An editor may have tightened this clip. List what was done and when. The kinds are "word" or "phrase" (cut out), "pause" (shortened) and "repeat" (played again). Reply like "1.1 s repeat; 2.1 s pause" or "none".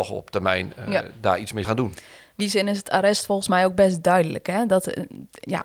1.6 s word; 2.4 s word